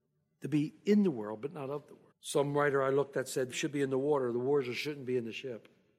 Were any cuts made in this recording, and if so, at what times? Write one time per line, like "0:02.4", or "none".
0:02.1
0:03.5